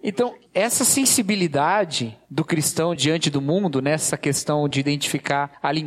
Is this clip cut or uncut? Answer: uncut